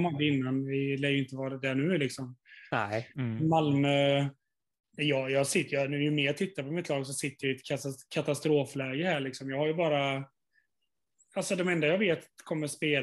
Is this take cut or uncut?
uncut